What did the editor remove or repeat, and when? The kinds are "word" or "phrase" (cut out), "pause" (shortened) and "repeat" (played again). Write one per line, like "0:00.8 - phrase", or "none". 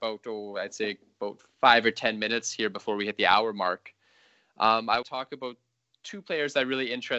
0:05.0 - word